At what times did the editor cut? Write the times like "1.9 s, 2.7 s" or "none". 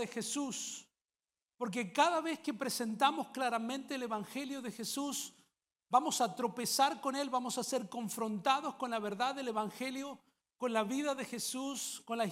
none